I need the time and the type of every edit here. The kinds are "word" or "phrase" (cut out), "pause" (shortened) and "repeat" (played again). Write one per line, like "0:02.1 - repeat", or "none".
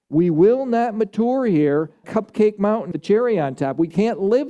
0:02.0 - word
0:02.9 - word